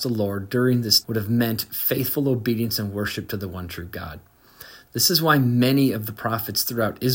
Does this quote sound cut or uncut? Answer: cut